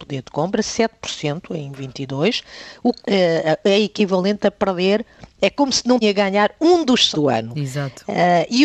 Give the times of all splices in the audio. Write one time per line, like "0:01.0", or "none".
0:03.0
0:06.0
0:07.1